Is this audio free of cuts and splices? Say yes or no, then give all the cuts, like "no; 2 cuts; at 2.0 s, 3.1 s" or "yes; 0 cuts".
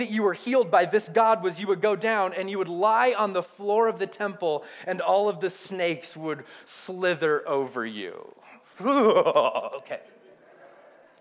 yes; 0 cuts